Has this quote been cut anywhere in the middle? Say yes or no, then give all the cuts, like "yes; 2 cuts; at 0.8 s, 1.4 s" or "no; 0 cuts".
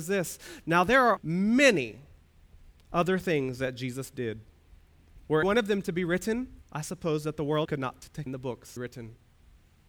yes; 6 cuts; at 1.2 s, 5.4 s, 6.6 s, 7.6 s, 8.3 s, 8.8 s